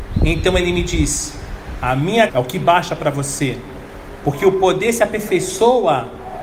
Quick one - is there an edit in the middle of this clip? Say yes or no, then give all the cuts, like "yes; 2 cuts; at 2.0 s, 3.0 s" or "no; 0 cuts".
yes; 1 cut; at 2.3 s